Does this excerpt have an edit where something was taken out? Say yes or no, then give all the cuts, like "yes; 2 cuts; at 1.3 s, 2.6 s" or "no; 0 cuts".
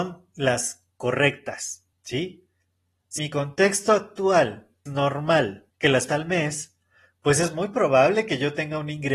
yes; 5 cuts; at 1.9 s, 3.2 s, 4.9 s, 5.7 s, 6.1 s